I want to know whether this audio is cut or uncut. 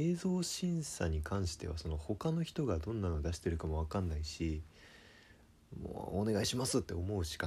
uncut